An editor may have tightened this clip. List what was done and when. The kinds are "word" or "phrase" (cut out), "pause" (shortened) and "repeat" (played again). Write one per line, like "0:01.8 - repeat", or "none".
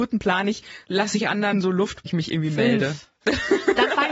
0:01.5 - word
0:02.1 - word